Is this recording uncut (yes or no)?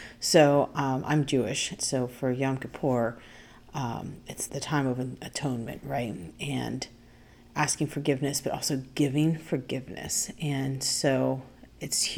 no